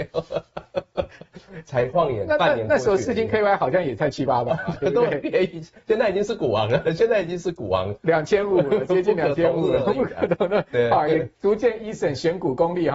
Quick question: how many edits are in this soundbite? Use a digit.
1